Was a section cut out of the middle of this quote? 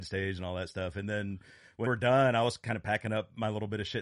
yes; 1 cut; at 1.9 s

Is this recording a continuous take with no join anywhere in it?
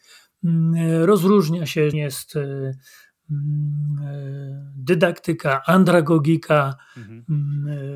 no; 1 cut; at 1.9 s

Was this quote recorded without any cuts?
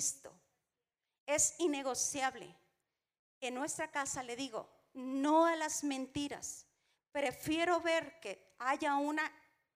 yes; 0 cuts

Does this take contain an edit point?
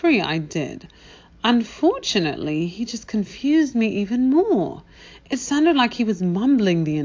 no; 0 cuts

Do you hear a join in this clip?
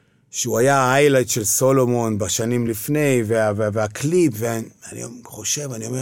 no; 0 cuts

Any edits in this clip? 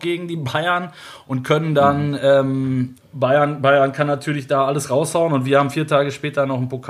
no; 0 cuts

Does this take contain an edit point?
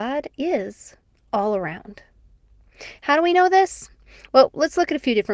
no; 0 cuts

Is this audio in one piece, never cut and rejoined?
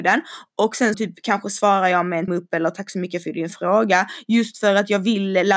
no; 2 cuts; at 0.9 s, 2.3 s

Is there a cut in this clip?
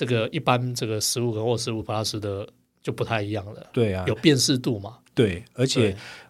no; 0 cuts

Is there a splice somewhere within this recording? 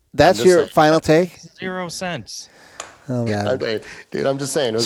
yes; 2 cuts; at 3.3 s, 3.6 s

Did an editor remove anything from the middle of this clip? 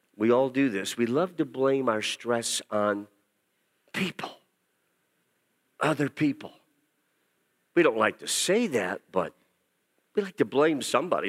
no; 0 cuts

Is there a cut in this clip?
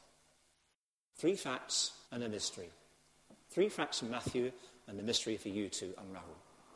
yes; 1 cut; at 2.1 s

